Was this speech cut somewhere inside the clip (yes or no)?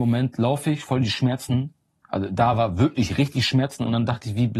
no